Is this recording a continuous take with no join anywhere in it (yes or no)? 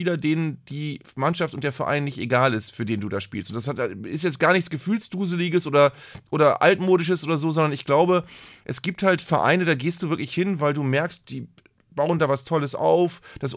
yes